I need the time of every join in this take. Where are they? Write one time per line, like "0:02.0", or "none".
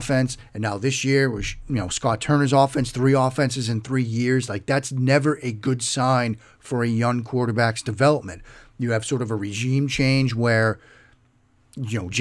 none